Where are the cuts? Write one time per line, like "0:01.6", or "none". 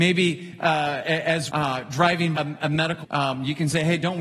0:01.5
0:02.3
0:03.0